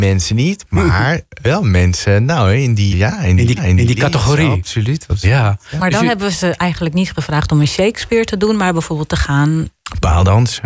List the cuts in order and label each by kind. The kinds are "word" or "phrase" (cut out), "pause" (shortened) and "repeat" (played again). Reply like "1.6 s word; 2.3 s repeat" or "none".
1.4 s word; 2.9 s word; 3.6 s repeat